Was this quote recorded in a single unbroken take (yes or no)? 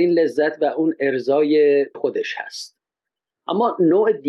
no